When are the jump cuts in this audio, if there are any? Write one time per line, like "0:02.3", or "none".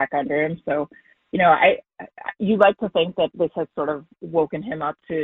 none